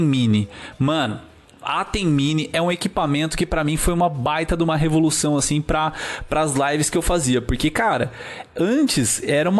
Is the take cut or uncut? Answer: uncut